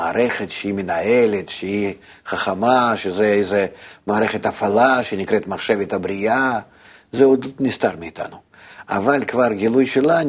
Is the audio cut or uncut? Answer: uncut